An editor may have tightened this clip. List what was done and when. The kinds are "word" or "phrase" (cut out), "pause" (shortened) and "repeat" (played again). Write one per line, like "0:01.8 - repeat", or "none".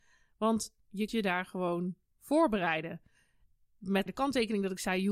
0:01.1 - word
0:02.1 - word
0:04.1 - word